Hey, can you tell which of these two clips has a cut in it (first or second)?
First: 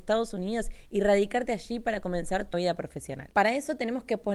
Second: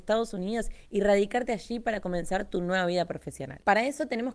first